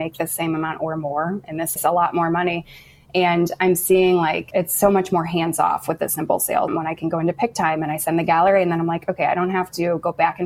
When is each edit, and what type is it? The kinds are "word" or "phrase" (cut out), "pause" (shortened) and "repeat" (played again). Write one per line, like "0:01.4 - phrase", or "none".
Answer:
0:01.8 - word
0:06.7 - word